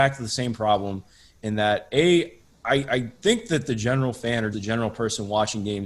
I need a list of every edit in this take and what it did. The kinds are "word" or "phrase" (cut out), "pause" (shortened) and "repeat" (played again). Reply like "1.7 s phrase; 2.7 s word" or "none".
4.5 s word